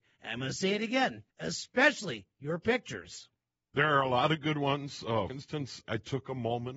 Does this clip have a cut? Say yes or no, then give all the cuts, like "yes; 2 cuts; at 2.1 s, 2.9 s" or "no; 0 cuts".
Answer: yes; 3 cuts; at 1.3 s, 5.3 s, 5.8 s